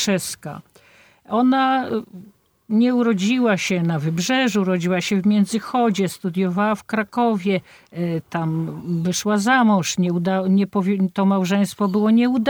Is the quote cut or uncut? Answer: uncut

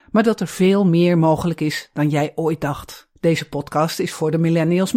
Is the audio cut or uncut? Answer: cut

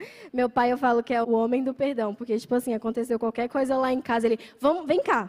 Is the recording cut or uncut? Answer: cut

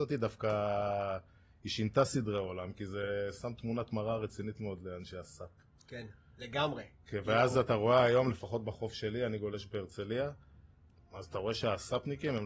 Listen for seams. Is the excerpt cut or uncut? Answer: uncut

